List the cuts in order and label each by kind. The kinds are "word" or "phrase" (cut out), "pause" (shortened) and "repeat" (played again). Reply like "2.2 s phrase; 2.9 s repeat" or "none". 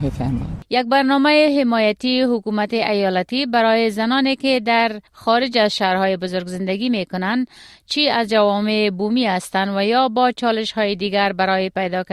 5.1 s pause